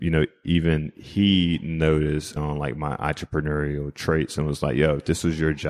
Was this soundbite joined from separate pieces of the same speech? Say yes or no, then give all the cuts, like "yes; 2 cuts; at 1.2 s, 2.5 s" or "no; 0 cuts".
yes; 1 cut; at 2.4 s